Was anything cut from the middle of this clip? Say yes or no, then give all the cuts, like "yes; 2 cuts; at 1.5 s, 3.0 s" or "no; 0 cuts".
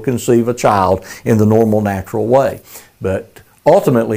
no; 0 cuts